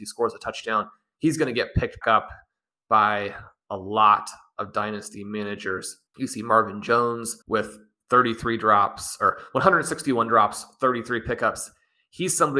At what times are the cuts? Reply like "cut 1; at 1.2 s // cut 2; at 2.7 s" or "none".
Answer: cut 1; at 2.0 s // cut 2; at 6.1 s // cut 3; at 7.4 s